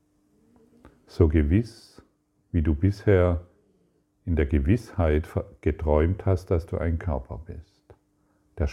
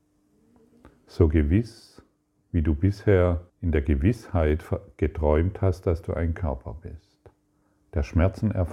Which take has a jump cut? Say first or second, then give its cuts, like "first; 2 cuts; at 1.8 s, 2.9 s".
second; 1 cut; at 3.5 s